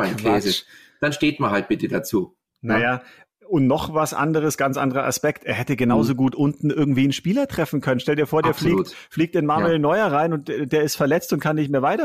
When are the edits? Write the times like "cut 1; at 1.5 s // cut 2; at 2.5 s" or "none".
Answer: cut 1; at 2.5 s